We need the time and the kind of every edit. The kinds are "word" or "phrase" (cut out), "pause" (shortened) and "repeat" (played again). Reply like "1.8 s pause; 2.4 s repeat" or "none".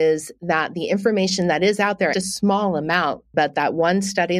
2.1 s phrase; 3.3 s phrase